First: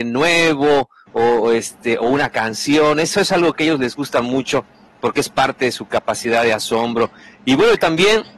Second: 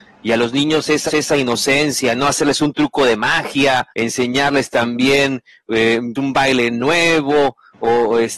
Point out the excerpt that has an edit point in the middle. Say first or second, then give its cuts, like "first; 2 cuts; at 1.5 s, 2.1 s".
second; 3 cuts; at 1.1 s, 3.9 s, 6.2 s